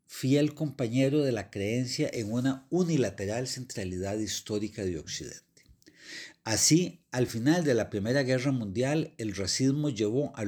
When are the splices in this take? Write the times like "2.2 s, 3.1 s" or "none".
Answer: none